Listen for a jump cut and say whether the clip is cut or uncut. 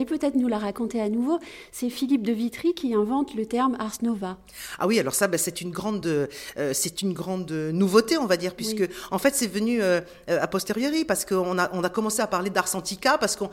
uncut